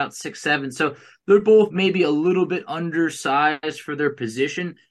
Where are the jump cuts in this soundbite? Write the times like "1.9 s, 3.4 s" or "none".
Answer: none